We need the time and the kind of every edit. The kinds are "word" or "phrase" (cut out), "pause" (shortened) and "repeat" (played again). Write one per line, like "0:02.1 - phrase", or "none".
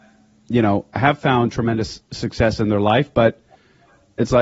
none